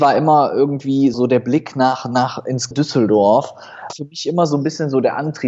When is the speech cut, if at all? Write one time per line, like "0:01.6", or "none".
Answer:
0:01.1
0:02.7
0:03.9